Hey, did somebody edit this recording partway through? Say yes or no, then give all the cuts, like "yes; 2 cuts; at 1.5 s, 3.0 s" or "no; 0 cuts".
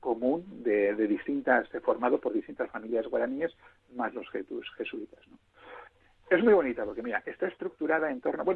no; 0 cuts